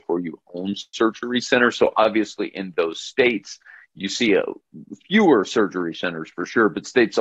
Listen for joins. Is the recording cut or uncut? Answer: uncut